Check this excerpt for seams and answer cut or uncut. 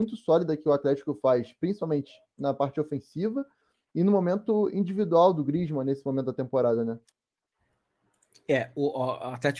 uncut